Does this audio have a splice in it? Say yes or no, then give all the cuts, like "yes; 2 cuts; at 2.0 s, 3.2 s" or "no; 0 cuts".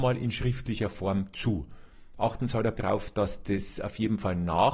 yes; 1 cut; at 2.8 s